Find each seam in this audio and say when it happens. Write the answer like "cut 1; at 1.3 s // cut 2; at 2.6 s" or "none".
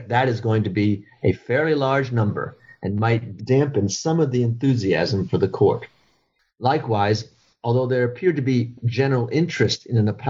none